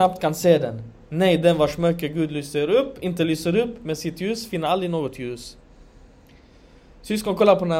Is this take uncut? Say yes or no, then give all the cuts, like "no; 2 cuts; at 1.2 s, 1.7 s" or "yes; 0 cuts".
yes; 0 cuts